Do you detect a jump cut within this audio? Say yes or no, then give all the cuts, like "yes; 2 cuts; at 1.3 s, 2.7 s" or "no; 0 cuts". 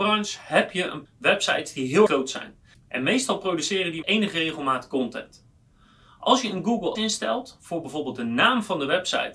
yes; 4 cuts; at 1.1 s, 2.1 s, 4.0 s, 7.0 s